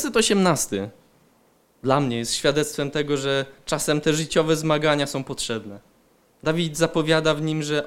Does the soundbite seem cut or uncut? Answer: uncut